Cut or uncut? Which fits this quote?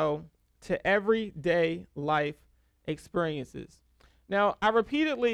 uncut